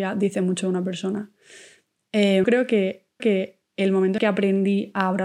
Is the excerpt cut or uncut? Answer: cut